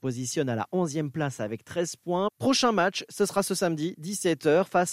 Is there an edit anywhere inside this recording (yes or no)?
no